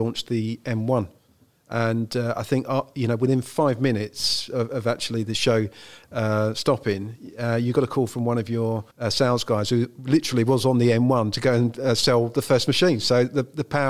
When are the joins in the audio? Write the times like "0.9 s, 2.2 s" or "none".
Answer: 8.9 s